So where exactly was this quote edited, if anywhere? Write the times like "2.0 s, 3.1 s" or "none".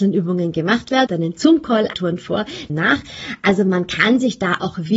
1.1 s, 1.9 s, 2.7 s